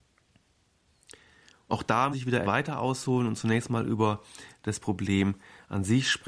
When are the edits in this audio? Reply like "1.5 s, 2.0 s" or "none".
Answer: 2.1 s, 2.4 s